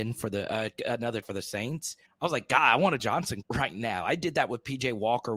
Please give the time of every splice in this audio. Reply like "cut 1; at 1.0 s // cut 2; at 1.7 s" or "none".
cut 1; at 1.2 s // cut 2; at 2.1 s // cut 3; at 3.0 s // cut 4; at 3.4 s